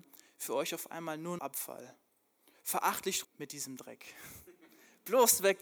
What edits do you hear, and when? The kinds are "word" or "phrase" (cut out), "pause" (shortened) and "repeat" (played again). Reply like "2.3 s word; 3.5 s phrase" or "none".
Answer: 1.4 s word; 3.2 s phrase